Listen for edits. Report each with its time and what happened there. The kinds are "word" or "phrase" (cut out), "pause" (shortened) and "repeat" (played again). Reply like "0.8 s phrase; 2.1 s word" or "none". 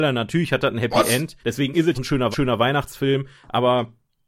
1.4 s pause; 1.9 s phrase; 2.3 s repeat